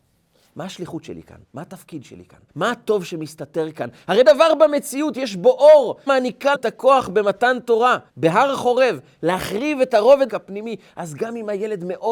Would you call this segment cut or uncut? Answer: cut